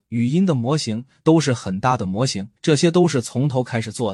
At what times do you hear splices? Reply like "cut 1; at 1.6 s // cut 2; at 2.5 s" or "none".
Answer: cut 1; at 2.6 s